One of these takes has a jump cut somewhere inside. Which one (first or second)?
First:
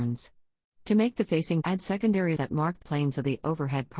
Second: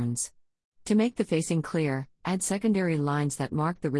first